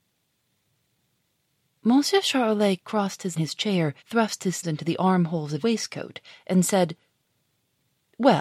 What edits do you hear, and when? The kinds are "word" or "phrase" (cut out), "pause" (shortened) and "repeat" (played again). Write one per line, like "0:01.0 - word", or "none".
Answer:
0:03.4 - phrase
0:04.0 - pause
0:04.6 - word
0:05.6 - word